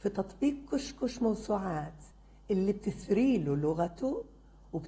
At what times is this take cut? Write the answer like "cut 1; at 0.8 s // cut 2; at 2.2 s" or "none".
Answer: none